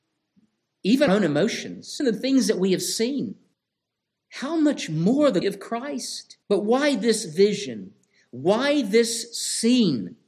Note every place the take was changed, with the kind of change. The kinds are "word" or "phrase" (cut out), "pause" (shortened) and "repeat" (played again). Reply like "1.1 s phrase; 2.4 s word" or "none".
1.1 s word; 2.0 s word; 3.5 s pause; 5.4 s word; 6.4 s pause